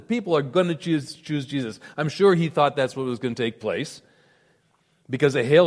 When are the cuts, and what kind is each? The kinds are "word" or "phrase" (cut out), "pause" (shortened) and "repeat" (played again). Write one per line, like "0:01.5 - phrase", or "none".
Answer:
none